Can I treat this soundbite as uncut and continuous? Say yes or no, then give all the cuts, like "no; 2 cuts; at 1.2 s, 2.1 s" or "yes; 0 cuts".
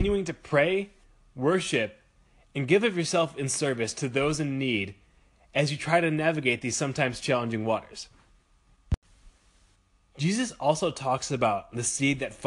yes; 0 cuts